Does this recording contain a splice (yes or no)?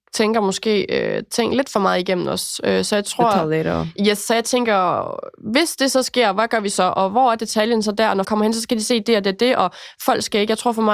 yes